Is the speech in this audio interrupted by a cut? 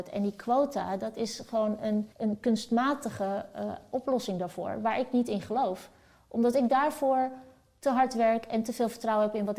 yes; 1 cut; at 2.1 s

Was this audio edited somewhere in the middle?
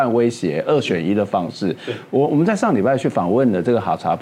no; 0 cuts

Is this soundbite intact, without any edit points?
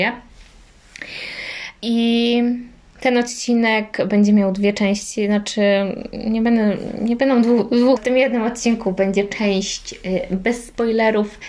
no; 2 cuts; at 1.8 s, 8.0 s

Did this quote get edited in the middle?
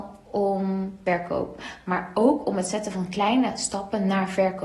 no; 0 cuts

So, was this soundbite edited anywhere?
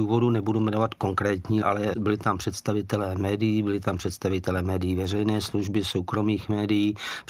yes; 1 cut; at 1.6 s

